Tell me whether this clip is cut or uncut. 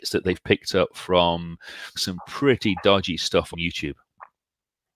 cut